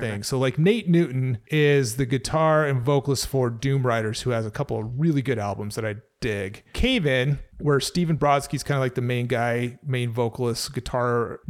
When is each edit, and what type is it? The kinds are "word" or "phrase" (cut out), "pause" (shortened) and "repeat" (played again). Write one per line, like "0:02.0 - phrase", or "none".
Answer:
none

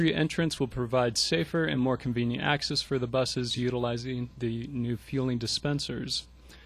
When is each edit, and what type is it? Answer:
none

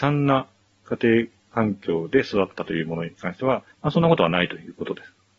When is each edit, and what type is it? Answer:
0:03.7 - pause

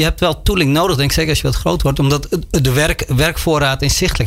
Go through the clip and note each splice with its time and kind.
none

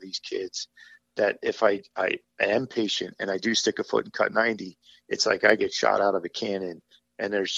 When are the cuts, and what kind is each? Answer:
none

